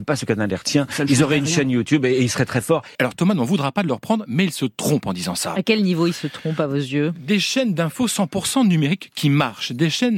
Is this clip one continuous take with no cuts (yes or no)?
no